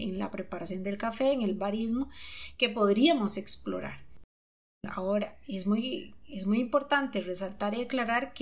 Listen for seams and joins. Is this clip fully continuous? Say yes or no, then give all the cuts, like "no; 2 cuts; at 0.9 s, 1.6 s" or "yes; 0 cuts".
yes; 0 cuts